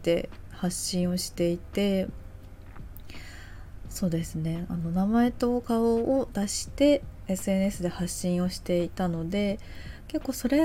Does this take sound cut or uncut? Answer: uncut